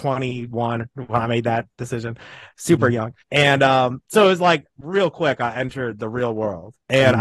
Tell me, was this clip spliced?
yes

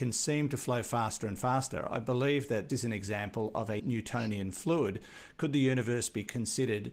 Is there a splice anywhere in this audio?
yes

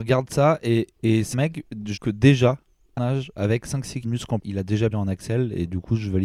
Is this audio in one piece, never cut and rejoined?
no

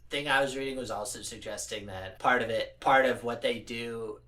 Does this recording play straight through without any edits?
no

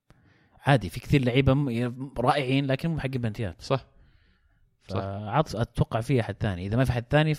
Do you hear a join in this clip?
no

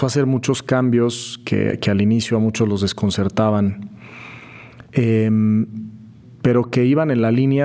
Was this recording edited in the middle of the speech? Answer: yes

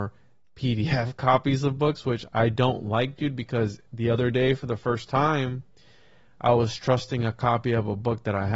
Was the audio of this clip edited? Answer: no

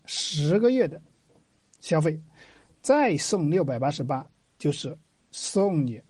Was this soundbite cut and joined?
no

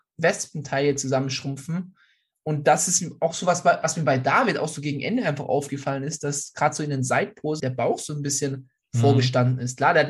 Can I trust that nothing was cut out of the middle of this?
no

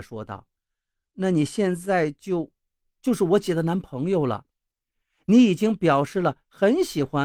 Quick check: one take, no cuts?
yes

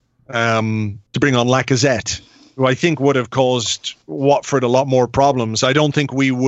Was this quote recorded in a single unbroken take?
no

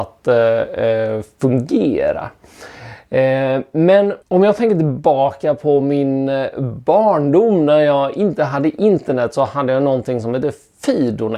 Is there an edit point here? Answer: yes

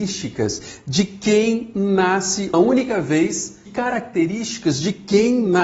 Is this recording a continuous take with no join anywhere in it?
no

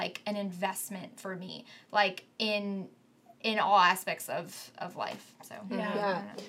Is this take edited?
no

